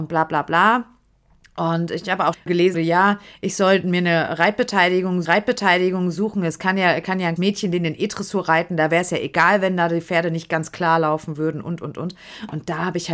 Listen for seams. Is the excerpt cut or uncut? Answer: cut